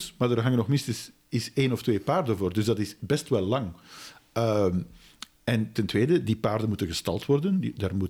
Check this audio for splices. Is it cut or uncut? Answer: uncut